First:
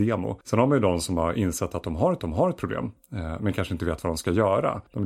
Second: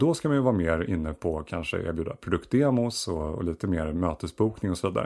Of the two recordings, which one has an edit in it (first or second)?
first